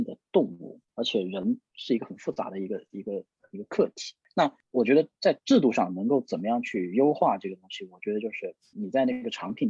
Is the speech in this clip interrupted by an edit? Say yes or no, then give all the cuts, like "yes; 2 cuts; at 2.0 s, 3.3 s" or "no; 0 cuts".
yes; 1 cut; at 8.7 s